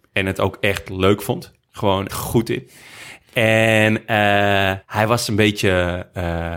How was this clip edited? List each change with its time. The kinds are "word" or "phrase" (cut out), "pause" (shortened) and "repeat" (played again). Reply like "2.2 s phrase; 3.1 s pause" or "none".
2.1 s phrase; 4.8 s pause